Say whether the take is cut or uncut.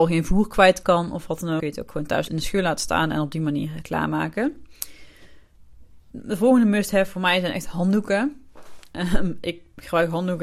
cut